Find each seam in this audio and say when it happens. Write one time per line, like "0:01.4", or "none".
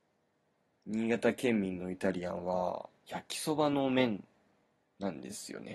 0:03.0